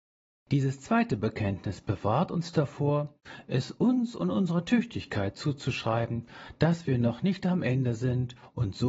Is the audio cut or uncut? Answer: uncut